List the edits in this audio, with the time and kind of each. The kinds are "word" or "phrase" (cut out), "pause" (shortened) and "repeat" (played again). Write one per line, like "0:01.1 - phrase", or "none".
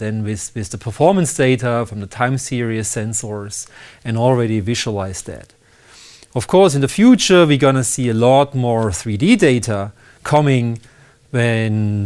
none